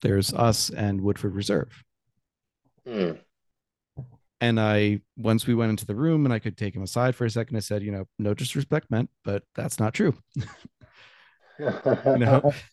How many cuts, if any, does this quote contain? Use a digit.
4